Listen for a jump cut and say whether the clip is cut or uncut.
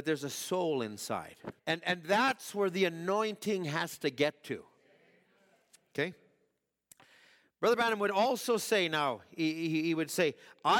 cut